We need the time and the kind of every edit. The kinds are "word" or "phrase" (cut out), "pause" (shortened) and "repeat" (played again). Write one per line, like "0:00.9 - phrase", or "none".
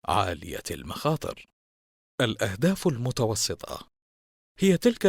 none

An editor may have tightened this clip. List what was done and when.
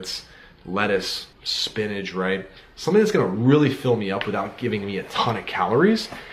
0:01.3 - pause

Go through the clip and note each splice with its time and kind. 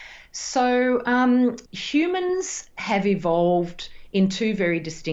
0:01.7 - pause

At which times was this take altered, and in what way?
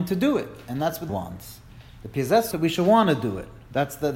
0:01.1 - phrase
0:02.5 - word

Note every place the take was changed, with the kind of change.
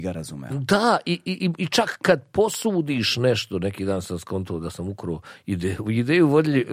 none

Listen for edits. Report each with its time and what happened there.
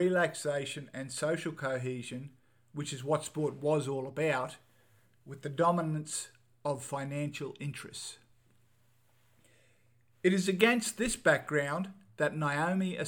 none

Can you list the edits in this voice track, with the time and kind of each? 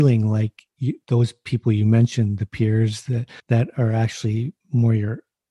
0:03.4 - pause
0:04.6 - pause

